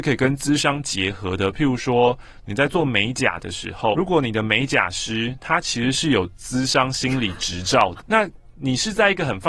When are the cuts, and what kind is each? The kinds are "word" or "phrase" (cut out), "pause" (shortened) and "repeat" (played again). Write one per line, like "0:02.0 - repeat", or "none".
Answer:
0:03.9 - word
0:08.0 - word